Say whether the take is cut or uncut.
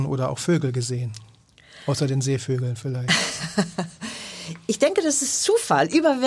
uncut